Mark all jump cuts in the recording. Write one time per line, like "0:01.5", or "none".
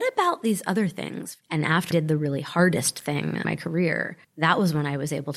0:01.4
0:01.9
0:03.4
0:04.2